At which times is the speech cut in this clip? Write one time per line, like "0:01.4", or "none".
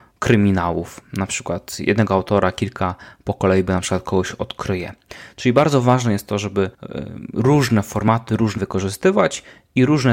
0:06.7
0:08.6

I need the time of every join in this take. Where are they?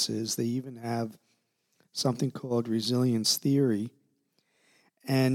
none

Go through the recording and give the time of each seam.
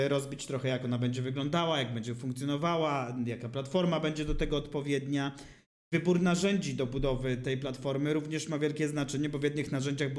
none

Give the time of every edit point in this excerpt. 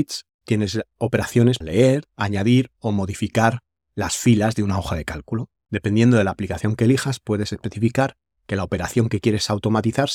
0:01.6

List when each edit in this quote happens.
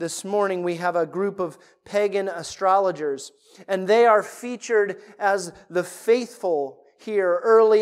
none

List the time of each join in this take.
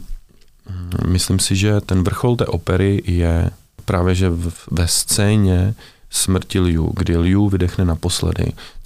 none

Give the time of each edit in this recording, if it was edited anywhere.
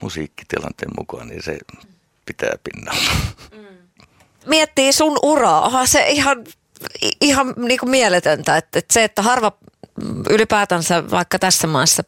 none

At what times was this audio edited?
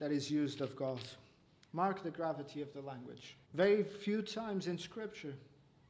0:01.4
0:03.4

